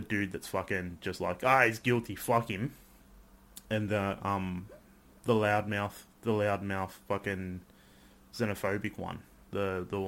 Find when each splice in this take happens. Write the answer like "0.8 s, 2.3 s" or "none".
none